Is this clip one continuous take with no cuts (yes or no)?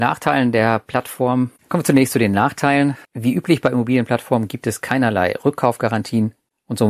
no